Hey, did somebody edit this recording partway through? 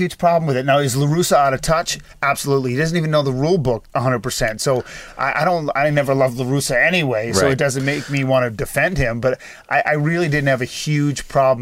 yes; 1 cut; at 3.9 s

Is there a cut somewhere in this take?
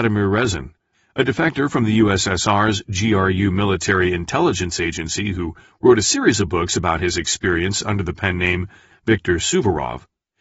no; 0 cuts

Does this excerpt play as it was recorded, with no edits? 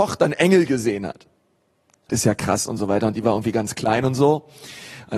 no; 1 cut; at 2.1 s

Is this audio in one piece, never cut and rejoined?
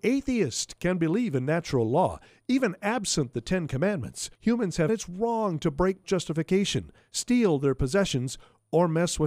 no; 3 cuts; at 4.3 s, 4.9 s, 6.0 s

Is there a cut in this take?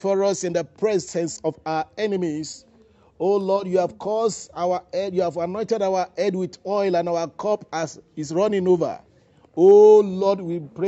no; 0 cuts

